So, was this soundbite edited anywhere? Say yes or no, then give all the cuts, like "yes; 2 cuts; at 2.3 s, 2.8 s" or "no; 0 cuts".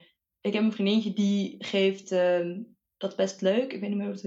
no; 0 cuts